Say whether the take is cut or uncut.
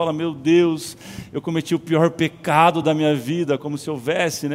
uncut